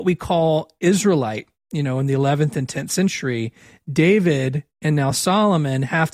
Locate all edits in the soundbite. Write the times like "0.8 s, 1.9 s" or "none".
none